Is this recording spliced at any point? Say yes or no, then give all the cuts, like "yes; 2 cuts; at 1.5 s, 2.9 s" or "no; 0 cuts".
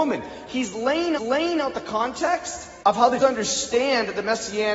yes; 3 cuts; at 1.2 s, 2.8 s, 3.2 s